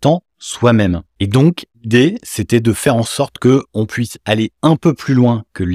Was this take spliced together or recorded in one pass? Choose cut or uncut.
cut